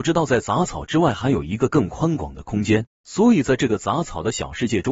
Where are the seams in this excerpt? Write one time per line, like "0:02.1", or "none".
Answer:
0:02.9